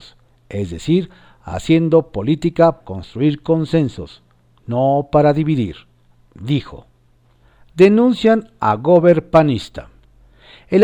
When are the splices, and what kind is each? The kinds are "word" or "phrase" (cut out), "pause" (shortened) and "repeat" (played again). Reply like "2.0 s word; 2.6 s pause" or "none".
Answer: 2.8 s word